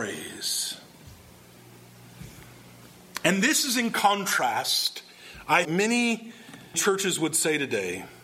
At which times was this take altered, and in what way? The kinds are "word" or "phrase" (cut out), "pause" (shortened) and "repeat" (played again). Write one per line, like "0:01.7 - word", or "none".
0:05.6 - phrase
0:06.7 - word